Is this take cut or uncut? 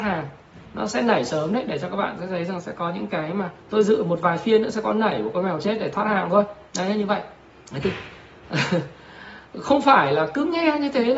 cut